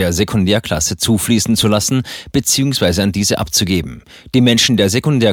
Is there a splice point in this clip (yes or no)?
no